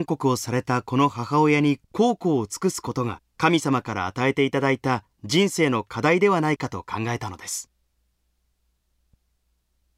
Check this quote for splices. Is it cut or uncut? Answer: cut